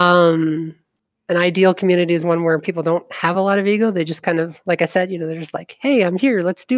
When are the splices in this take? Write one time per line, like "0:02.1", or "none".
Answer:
none

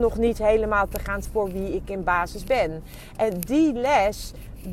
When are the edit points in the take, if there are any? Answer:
0:01.2

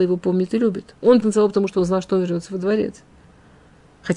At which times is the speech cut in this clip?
0:01.2

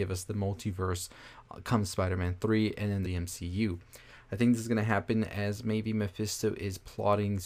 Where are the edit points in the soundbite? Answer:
0:03.0

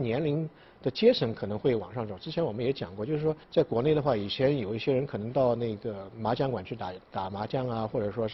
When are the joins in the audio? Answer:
0:03.4

